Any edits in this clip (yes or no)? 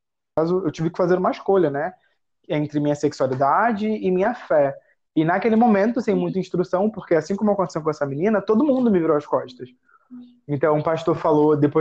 no